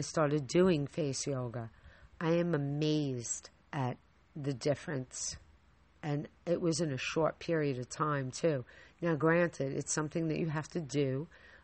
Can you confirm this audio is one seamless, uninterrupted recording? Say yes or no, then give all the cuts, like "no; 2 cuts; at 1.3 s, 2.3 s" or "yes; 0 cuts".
no; 1 cut; at 3.6 s